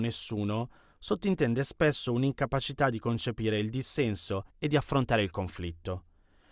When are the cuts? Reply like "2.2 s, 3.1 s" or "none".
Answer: 4.5 s

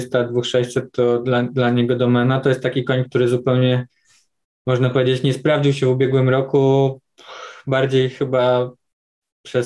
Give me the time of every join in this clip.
none

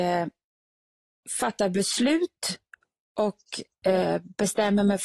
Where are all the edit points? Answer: none

